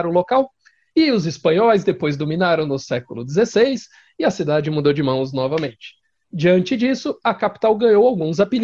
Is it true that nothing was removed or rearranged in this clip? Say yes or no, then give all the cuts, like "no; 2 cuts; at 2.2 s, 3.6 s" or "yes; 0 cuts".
yes; 0 cuts